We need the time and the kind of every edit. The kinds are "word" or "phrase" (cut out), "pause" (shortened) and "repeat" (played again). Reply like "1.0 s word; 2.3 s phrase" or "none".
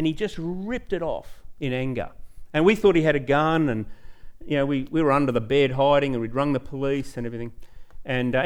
none